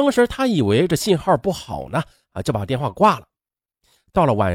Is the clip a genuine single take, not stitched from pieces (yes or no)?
yes